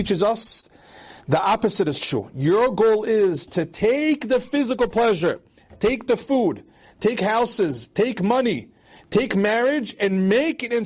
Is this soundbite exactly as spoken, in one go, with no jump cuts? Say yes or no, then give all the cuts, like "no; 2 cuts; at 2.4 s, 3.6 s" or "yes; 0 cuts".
yes; 0 cuts